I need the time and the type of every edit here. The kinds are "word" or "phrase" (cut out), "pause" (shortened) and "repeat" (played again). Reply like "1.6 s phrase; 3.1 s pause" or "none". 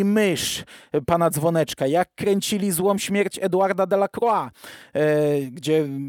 none